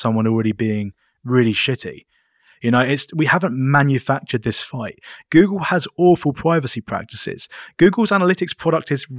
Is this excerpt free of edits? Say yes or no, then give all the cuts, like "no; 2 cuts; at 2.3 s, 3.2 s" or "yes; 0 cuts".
yes; 0 cuts